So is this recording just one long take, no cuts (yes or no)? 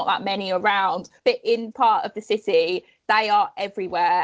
no